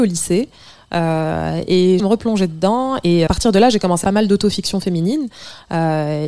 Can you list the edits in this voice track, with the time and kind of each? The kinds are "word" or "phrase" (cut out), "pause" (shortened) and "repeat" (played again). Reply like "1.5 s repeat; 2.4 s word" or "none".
2.0 s phrase; 3.3 s word; 4.0 s phrase